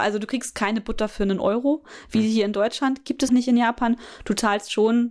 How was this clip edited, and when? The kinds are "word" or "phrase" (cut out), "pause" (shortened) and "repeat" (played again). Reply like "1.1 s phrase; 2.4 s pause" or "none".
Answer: 3.3 s word